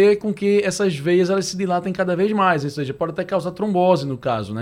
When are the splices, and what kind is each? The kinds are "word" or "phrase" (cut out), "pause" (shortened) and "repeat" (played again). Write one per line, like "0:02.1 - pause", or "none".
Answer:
none